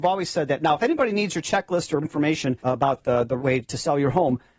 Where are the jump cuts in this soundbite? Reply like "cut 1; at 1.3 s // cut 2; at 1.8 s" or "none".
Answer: cut 1; at 2.0 s // cut 2; at 2.6 s // cut 3; at 3.4 s